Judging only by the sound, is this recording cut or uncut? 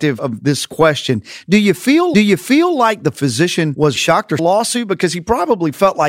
cut